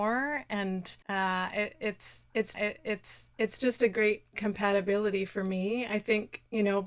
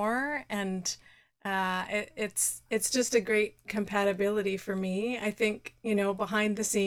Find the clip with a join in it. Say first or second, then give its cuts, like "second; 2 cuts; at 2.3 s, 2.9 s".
first; 2 cuts; at 1.0 s, 2.5 s